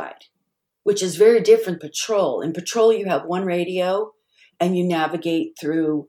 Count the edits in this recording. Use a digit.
1